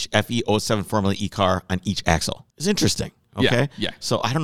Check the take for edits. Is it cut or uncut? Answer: cut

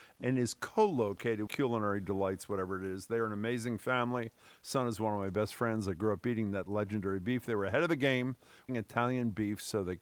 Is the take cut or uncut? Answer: cut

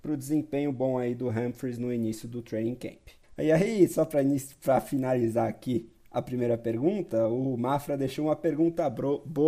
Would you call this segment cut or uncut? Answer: uncut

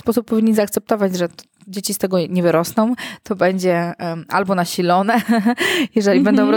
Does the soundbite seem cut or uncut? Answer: uncut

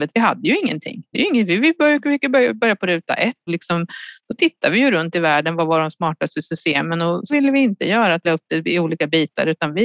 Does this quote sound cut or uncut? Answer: cut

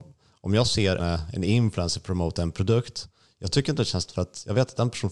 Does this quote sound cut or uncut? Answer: cut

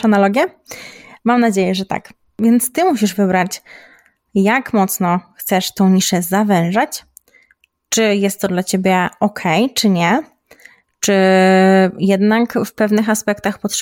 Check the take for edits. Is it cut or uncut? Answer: uncut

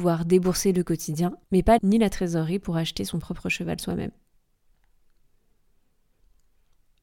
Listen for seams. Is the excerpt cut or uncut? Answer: cut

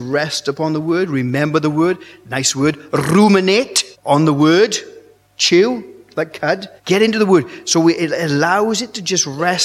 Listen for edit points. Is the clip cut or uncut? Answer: cut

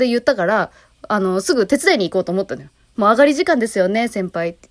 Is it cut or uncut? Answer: uncut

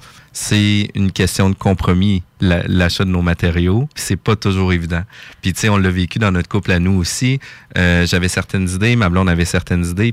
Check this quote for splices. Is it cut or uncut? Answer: uncut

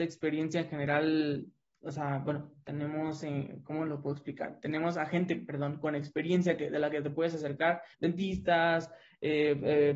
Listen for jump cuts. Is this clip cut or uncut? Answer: cut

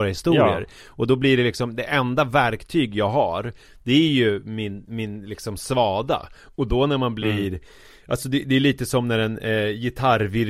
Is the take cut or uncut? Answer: uncut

